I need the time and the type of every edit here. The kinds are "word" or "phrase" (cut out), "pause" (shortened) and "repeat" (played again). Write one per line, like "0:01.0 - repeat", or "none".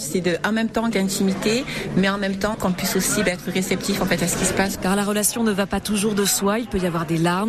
0:00.9 - phrase
0:02.5 - word